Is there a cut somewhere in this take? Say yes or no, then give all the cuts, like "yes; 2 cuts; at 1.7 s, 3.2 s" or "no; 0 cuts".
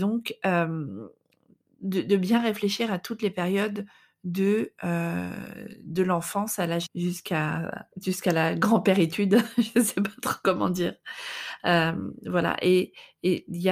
yes; 2 cuts; at 6.9 s, 7.9 s